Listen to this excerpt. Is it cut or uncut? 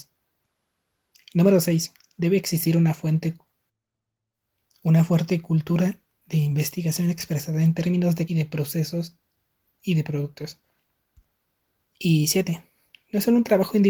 cut